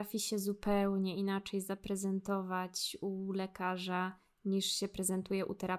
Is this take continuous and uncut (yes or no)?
yes